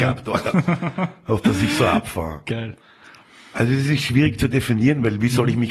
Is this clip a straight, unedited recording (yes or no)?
yes